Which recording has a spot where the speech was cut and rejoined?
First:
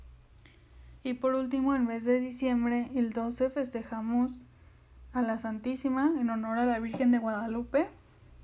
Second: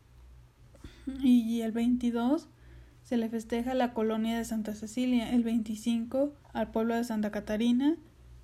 second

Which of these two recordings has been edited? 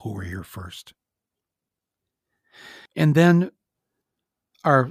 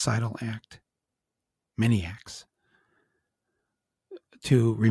first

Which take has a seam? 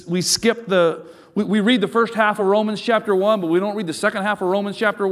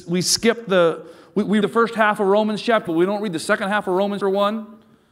second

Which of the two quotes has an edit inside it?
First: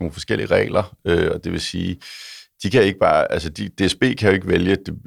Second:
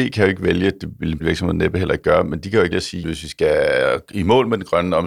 second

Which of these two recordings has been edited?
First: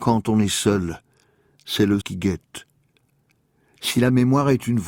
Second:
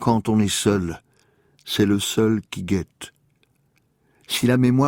first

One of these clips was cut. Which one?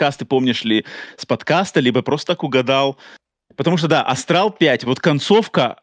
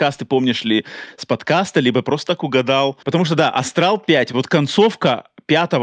second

